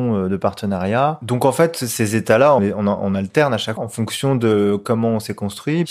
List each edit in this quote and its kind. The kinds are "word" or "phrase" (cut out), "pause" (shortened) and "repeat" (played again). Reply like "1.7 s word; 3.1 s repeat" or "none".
2.6 s word; 3.8 s word